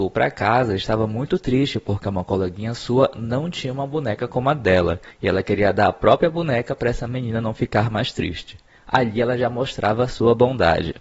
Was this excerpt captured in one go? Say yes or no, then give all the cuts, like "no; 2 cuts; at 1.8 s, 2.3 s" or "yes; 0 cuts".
yes; 0 cuts